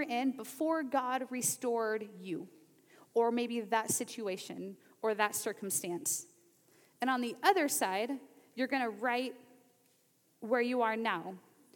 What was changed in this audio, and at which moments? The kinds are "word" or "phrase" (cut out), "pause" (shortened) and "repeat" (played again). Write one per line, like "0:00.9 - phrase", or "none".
none